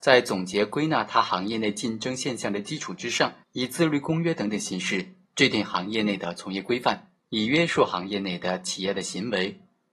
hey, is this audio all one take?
no; 2 cuts; at 3.4 s, 7.2 s

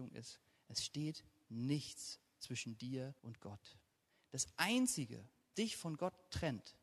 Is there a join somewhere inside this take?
yes; 2 cuts; at 3.2 s, 5.5 s

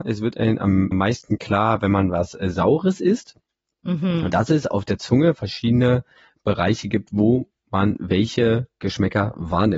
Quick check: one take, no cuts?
no; 1 cut; at 0.9 s

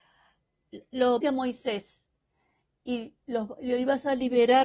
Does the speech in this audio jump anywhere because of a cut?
yes; 2 cuts; at 1.2 s, 3.2 s

